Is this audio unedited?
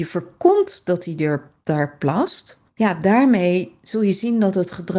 no; 1 cut; at 2.7 s

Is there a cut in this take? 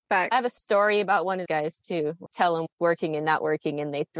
yes; 3 cuts; at 1.5 s, 2.3 s, 2.7 s

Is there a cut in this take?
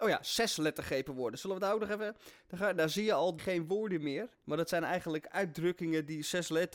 yes; 2 cuts; at 3.4 s, 4.3 s

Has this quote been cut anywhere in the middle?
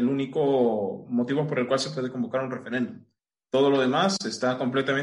no; 0 cuts

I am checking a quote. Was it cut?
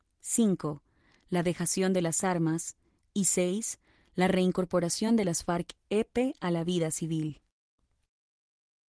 no; 0 cuts

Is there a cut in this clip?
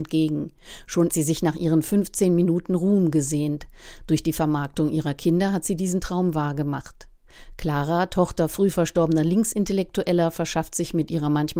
yes; 1 cut; at 1.1 s

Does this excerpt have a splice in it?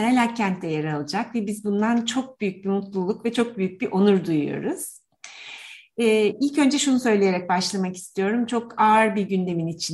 no; 0 cuts

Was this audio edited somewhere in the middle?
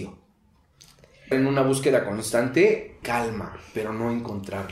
yes; 2 cuts; at 1.3 s, 3.0 s

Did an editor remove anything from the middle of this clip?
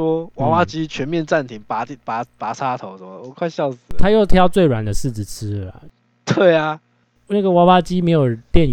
no; 0 cuts

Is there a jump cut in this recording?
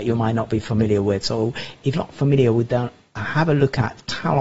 yes; 1 cut; at 1.9 s

